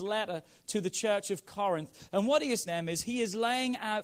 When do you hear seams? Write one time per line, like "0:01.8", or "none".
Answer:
0:02.7